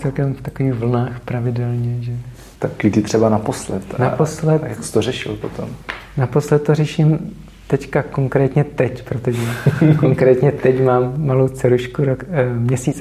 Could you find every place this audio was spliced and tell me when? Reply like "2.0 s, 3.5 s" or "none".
2.5 s

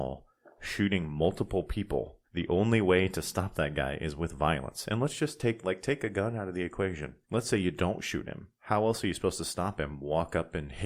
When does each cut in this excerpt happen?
2.2 s, 7.2 s, 8.6 s

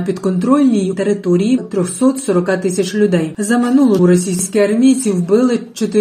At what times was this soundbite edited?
0.9 s, 1.6 s, 4.0 s

